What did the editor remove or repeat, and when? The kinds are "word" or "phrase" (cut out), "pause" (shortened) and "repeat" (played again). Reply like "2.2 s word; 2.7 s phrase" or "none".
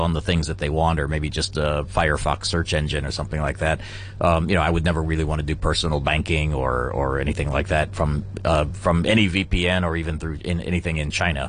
none